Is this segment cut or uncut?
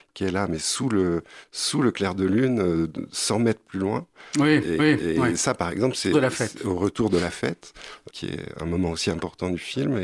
cut